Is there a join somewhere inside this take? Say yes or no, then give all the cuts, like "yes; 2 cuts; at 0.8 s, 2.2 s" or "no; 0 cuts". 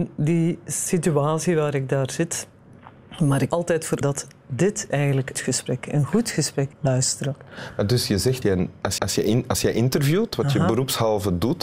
yes; 7 cuts; at 3.5 s, 4.0 s, 4.9 s, 5.3 s, 6.7 s, 8.4 s, 9.0 s